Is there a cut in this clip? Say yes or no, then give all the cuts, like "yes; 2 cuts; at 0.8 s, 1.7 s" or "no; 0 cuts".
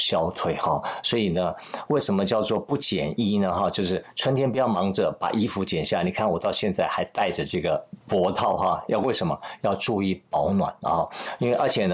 yes; 1 cut; at 8.0 s